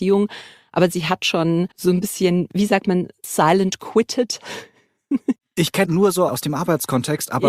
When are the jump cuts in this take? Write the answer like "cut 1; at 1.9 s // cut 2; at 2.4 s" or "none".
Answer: cut 1; at 1.7 s // cut 2; at 5.8 s